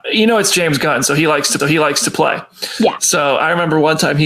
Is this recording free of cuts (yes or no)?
no